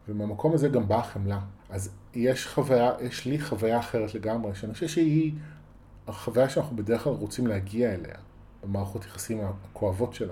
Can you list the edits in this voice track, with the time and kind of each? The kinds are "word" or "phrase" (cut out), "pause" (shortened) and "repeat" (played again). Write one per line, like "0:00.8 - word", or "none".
0:01.6 - pause